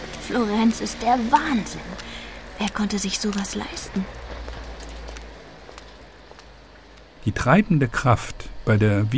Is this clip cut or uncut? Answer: uncut